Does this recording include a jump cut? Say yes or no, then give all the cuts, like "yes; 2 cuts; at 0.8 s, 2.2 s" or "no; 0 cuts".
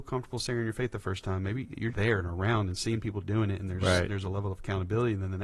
yes; 1 cut; at 1.9 s